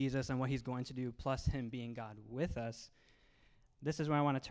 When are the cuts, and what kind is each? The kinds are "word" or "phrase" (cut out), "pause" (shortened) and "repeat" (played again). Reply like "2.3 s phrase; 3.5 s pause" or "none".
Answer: none